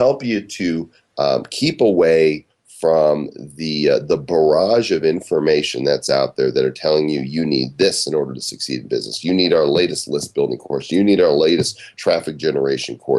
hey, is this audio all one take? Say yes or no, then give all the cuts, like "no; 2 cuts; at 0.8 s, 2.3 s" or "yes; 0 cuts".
yes; 0 cuts